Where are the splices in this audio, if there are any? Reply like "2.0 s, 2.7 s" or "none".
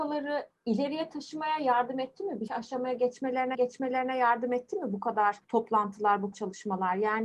2.5 s, 3.5 s, 5.4 s, 6.3 s